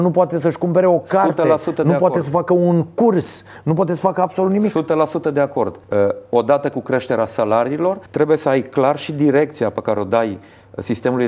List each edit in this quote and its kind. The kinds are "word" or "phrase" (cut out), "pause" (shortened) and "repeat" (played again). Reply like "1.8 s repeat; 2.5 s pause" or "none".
5.8 s pause; 8.1 s pause